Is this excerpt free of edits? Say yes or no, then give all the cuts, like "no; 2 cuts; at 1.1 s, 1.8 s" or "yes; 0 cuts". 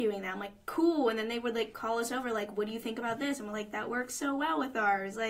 yes; 0 cuts